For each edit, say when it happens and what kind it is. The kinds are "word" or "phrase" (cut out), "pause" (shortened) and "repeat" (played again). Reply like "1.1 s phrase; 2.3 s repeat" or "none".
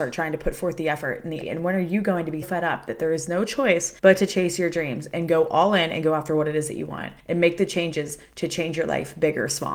1.4 s word; 2.4 s word; 4.0 s pause; 7.2 s pause